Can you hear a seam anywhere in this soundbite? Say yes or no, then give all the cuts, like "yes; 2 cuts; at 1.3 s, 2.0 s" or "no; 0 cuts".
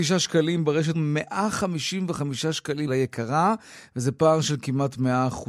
yes; 2 cuts; at 0.9 s, 2.9 s